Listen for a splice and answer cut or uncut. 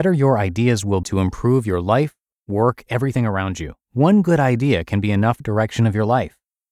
cut